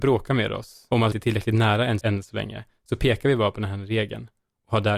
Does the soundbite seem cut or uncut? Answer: cut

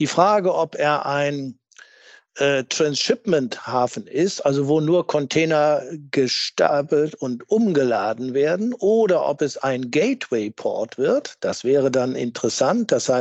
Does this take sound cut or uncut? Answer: uncut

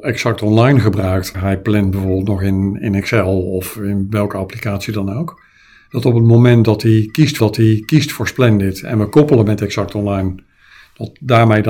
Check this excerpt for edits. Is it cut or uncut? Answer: cut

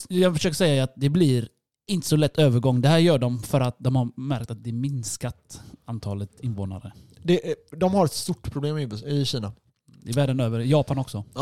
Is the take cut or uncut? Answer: uncut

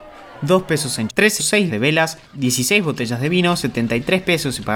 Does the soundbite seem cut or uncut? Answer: cut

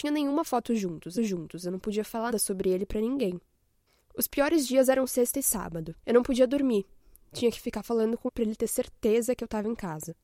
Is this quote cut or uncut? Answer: cut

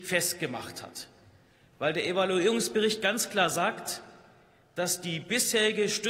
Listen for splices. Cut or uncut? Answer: uncut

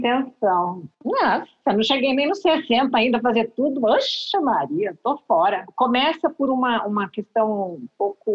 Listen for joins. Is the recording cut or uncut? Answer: cut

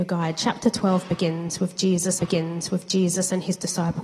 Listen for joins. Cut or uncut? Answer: cut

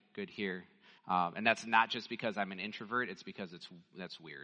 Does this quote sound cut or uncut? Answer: cut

